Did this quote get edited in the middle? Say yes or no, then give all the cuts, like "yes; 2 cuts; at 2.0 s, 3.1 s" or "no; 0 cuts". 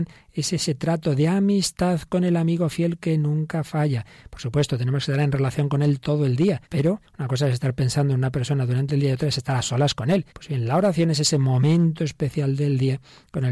yes; 2 cuts; at 6.6 s, 10.3 s